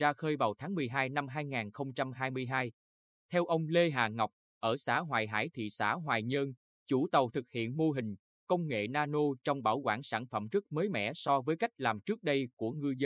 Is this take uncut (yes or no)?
yes